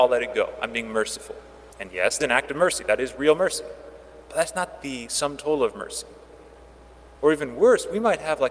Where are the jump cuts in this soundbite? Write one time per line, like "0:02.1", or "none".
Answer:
0:01.7
0:02.2
0:07.2